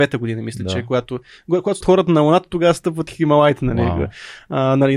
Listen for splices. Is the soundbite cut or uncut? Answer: cut